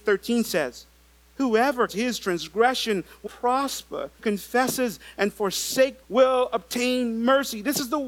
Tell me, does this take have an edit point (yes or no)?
yes